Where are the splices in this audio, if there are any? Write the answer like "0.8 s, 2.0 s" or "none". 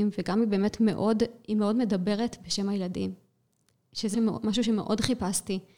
4.1 s